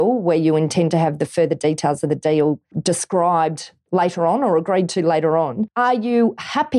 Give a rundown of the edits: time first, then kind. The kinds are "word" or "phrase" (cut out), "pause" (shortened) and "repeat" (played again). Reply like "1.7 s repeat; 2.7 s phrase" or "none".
none